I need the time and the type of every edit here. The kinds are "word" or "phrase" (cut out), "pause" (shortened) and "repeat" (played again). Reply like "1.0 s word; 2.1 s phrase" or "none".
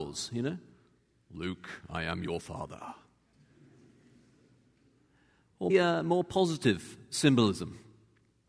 5.7 s word